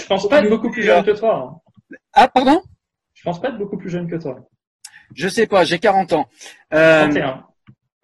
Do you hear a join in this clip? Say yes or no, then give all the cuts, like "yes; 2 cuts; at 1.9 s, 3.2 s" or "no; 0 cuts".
no; 0 cuts